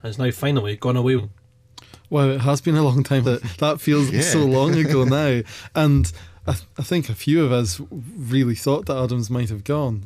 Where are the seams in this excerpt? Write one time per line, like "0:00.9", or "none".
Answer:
0:01.2
0:03.2
0:04.1
0:06.4